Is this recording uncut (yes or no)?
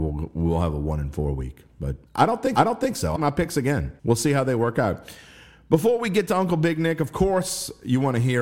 no